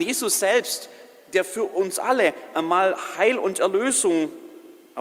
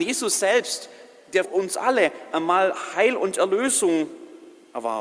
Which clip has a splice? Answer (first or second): second